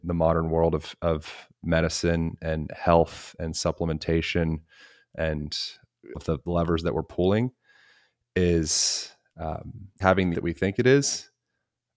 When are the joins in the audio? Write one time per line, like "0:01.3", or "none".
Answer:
0:06.1
0:10.0
0:10.3